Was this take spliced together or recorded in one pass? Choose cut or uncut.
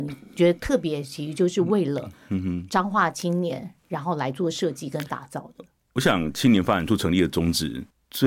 uncut